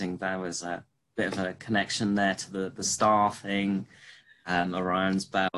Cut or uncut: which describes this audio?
uncut